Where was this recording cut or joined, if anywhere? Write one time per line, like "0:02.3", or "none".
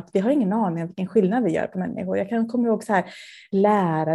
none